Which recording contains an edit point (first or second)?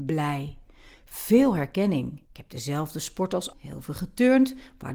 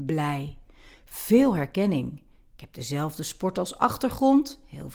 first